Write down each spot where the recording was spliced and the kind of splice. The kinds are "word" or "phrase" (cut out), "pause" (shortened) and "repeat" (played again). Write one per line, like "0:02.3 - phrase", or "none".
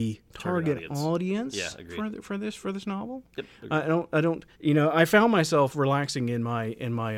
0:04.5 - pause